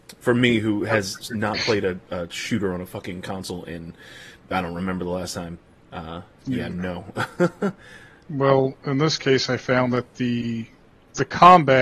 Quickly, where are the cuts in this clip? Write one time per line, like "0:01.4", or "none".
none